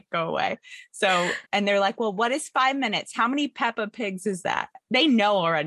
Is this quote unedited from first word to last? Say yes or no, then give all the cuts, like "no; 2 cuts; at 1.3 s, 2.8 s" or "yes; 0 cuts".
no; 1 cut; at 1.5 s